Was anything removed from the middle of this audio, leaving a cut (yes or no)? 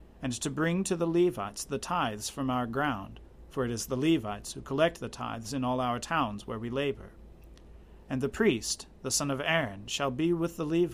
no